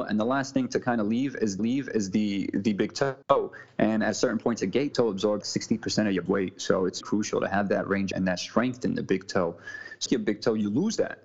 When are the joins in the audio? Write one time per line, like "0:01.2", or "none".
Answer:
0:01.6
0:03.2
0:04.9
0:05.4
0:06.3
0:07.0
0:08.1
0:10.1